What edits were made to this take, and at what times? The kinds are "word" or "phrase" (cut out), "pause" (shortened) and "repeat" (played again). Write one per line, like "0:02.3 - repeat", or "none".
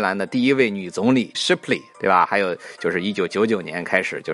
0:01.3 - word